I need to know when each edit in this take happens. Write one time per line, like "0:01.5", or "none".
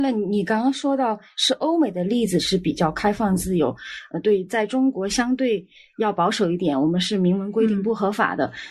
none